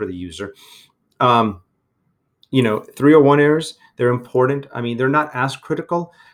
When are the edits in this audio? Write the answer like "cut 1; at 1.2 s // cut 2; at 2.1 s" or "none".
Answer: none